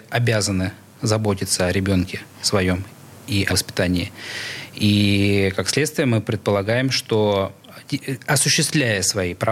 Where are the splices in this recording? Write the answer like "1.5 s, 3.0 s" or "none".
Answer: 3.5 s

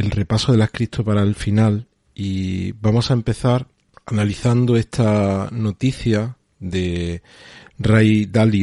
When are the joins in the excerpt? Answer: none

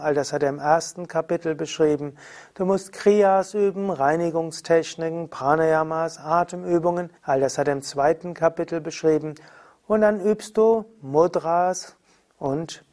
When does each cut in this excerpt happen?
7.2 s

